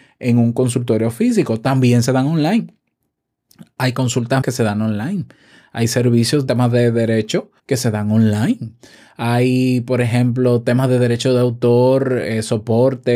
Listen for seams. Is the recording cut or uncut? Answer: cut